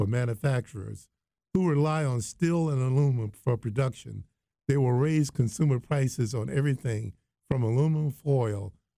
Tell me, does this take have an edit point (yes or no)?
no